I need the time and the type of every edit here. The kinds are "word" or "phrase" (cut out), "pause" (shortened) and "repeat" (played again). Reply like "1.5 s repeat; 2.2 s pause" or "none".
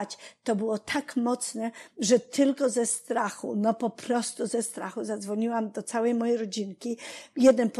none